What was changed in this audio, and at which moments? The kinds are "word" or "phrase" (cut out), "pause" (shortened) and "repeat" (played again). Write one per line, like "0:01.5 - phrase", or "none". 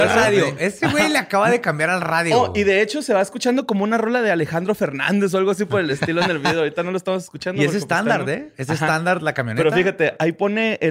none